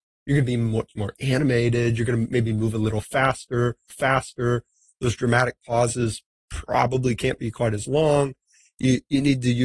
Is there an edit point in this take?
yes; 1 cut; at 3.9 s

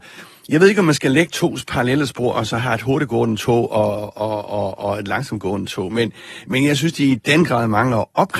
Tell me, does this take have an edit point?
no; 0 cuts

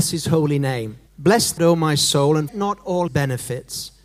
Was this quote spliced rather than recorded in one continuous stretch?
yes; 4 cuts; at 1.1 s, 1.6 s, 2.5 s, 3.1 s

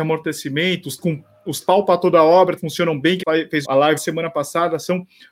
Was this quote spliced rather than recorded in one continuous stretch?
yes; 6 cuts; at 1.0 s, 1.6 s, 2.6 s, 3.2 s, 3.6 s, 4.0 s

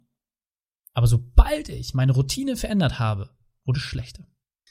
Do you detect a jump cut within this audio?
no; 0 cuts

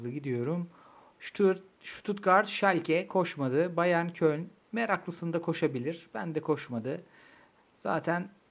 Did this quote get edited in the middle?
no; 0 cuts

